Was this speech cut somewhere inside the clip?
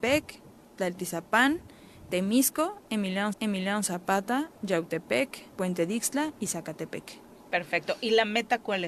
yes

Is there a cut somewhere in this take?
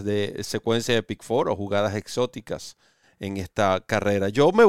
no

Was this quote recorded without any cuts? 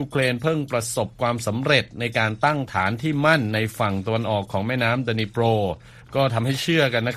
no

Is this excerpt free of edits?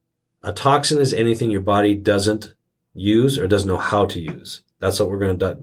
yes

